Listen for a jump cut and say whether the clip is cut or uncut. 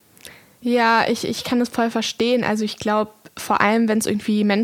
uncut